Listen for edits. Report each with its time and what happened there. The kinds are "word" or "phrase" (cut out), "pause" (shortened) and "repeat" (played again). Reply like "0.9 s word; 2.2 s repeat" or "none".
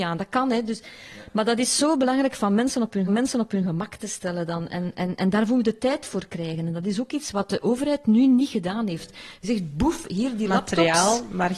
3.1 s repeat